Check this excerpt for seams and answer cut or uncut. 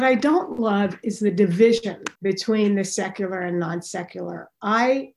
cut